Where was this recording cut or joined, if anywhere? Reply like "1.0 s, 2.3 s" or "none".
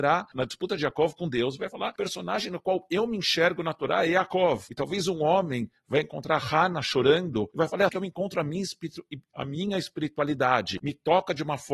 7.9 s